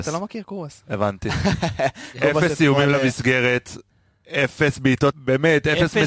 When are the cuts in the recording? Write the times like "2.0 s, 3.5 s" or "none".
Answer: 5.1 s